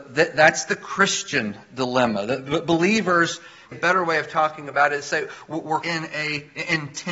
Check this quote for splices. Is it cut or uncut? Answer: cut